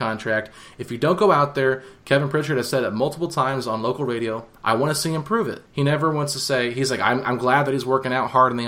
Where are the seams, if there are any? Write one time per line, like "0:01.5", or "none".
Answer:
0:05.6